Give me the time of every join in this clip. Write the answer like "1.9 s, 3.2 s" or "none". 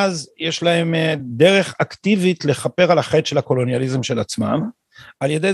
none